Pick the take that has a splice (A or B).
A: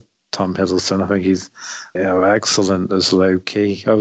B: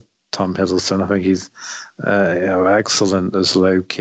A